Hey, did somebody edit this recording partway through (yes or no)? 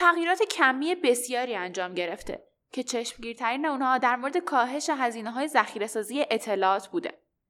no